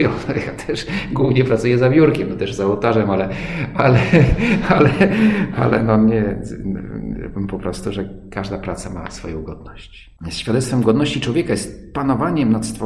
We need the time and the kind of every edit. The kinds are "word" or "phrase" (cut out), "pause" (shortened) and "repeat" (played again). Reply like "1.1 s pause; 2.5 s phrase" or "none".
10.2 s pause